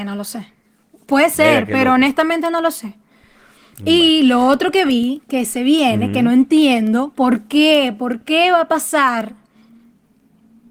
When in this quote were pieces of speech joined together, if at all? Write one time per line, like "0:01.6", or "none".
none